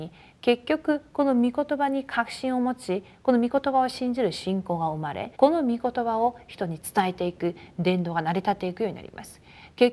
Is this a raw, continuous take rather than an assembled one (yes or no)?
no